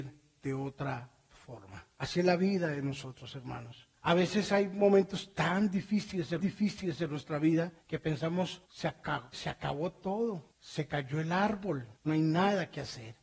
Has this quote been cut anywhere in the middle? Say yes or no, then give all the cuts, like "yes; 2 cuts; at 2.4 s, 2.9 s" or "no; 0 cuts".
yes; 8 cuts; at 1.9 s, 4.0 s, 6.4 s, 7.8 s, 8.6 s, 9.3 s, 10.5 s, 12.0 s